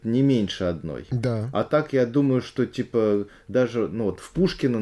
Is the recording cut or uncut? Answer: uncut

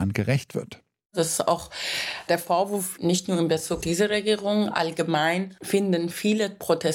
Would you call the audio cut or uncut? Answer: cut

